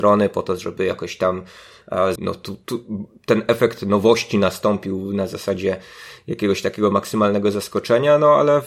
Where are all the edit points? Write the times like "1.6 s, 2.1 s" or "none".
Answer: 2.2 s